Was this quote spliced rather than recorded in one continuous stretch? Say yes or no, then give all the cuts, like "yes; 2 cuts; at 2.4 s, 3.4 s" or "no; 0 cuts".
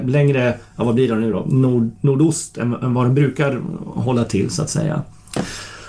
no; 0 cuts